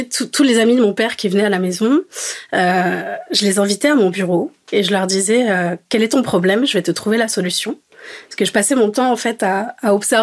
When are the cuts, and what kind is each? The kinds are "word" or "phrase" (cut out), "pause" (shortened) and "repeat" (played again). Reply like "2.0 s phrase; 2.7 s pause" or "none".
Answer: none